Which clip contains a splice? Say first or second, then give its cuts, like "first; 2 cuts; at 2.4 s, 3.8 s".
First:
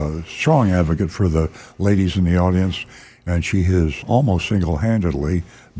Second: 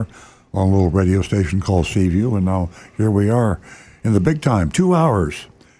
first; 1 cut; at 4.0 s